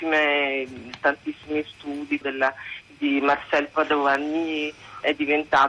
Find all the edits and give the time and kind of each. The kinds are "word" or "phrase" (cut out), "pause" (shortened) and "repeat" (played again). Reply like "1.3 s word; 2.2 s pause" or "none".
2.2 s phrase